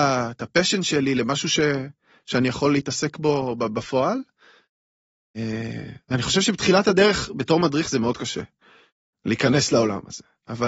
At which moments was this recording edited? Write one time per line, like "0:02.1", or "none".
none